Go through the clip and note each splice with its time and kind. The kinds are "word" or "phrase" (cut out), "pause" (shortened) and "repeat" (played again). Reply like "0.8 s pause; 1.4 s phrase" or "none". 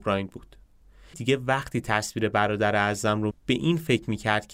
1.1 s word; 3.3 s word